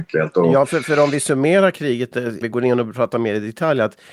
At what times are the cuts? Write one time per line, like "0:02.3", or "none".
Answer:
0:02.4